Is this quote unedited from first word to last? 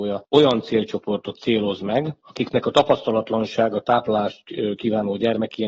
yes; 0 cuts

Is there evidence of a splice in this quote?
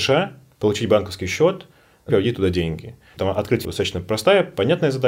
yes; 3 cuts; at 2.1 s, 3.2 s, 3.6 s

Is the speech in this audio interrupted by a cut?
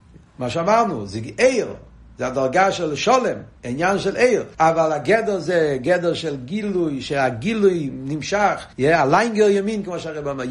yes; 3 cuts; at 3.6 s, 4.5 s, 8.7 s

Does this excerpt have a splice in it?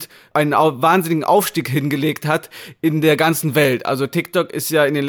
no; 0 cuts

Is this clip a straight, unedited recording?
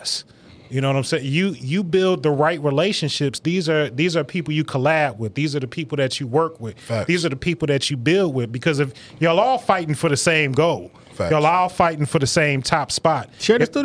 yes; 0 cuts

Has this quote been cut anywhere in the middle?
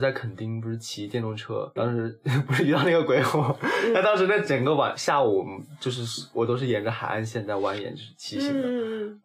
yes; 1 cut; at 1.8 s

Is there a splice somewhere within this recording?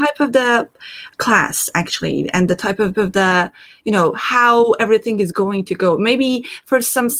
yes; 2 cuts; at 1.1 s, 2.9 s

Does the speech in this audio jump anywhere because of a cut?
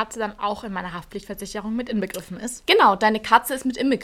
no; 0 cuts

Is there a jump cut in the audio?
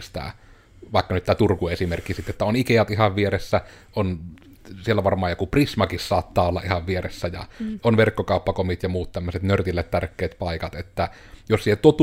no; 0 cuts

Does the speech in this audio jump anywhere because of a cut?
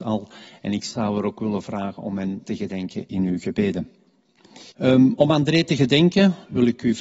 yes; 2 cuts; at 2.4 s, 4.7 s

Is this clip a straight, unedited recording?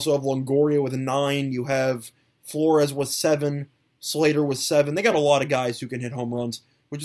yes; 0 cuts

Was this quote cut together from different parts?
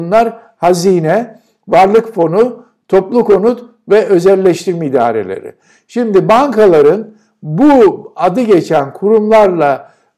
no; 0 cuts

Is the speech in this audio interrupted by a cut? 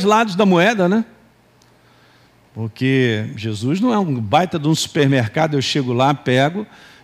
no; 0 cuts

